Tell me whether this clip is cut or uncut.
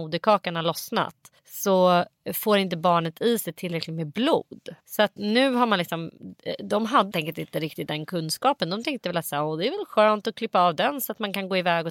cut